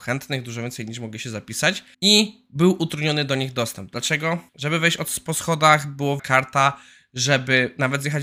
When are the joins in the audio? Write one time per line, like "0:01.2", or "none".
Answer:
0:01.9
0:04.5
0:06.2